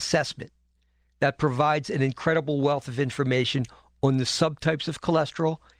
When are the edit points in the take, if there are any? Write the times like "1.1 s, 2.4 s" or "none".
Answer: none